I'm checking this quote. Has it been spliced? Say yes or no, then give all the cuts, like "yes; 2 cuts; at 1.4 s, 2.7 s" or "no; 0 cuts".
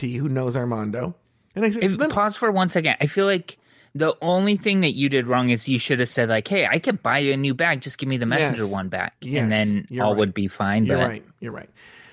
no; 0 cuts